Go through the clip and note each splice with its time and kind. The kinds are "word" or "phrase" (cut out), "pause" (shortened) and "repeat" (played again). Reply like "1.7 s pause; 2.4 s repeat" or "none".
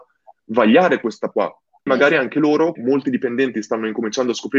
1.3 s word; 1.9 s word; 2.8 s word